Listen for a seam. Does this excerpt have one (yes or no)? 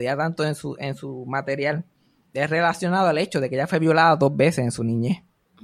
no